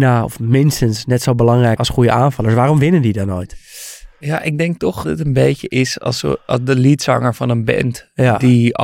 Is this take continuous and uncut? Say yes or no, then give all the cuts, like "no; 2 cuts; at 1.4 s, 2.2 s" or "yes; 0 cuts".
no; 2 cuts; at 1.8 s, 5.0 s